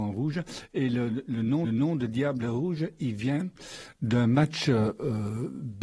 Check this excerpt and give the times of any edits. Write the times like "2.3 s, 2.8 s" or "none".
1.6 s